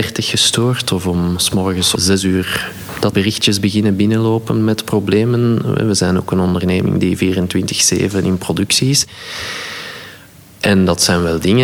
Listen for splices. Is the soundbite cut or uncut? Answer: cut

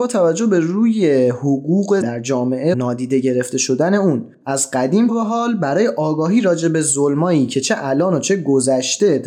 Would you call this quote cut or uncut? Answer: cut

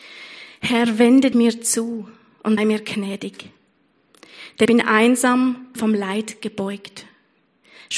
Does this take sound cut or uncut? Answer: cut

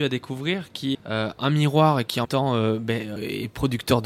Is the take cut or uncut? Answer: cut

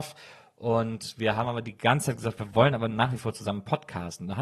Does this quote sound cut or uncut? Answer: uncut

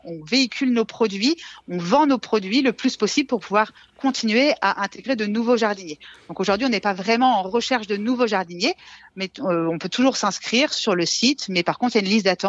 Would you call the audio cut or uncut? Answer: uncut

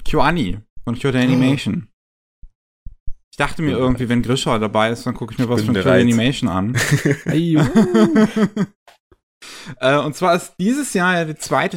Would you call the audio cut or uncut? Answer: uncut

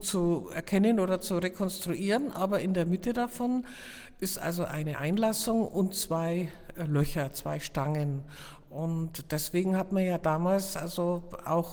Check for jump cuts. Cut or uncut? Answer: uncut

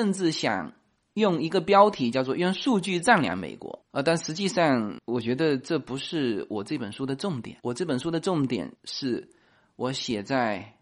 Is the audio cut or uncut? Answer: cut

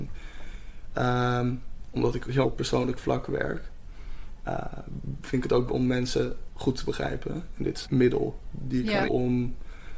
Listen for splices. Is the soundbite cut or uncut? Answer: cut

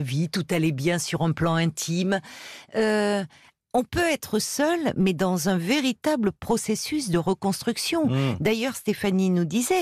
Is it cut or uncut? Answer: uncut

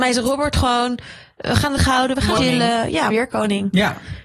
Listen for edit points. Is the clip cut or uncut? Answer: cut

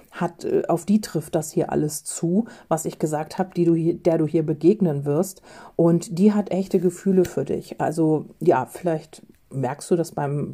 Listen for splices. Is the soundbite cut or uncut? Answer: uncut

